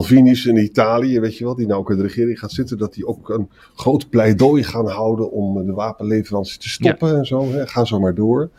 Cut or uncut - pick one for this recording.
uncut